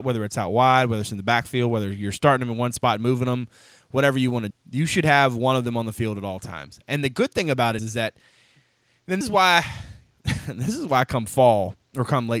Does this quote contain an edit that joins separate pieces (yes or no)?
yes